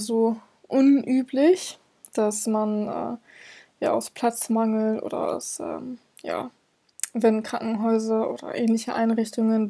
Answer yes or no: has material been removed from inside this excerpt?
no